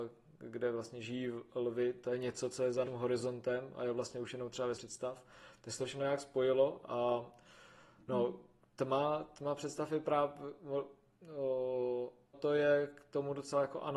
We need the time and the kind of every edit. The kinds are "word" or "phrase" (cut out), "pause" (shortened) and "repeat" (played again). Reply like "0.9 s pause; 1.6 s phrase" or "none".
2.8 s word; 4.7 s word; 12.3 s word